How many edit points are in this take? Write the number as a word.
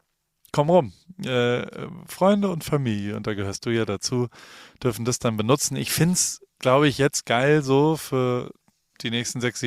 one